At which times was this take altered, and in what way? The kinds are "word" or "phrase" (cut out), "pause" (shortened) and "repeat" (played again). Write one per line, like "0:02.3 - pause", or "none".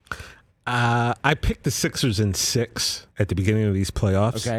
0:03.1 - pause